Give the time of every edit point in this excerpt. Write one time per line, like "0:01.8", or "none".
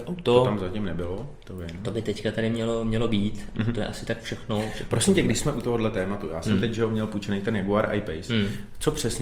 none